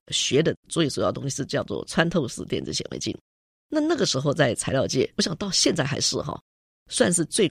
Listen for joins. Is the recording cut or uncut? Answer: cut